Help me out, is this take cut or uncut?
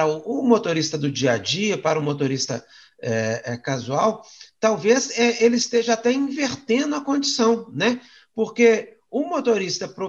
uncut